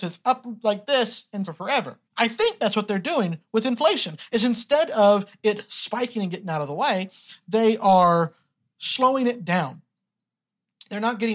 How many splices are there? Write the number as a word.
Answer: two